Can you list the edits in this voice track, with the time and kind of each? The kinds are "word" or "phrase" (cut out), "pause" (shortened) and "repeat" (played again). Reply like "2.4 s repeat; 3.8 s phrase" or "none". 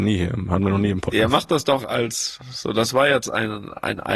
1.8 s word